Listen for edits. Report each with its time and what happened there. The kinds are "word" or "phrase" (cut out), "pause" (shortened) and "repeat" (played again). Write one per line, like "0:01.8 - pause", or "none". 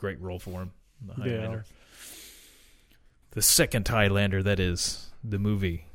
none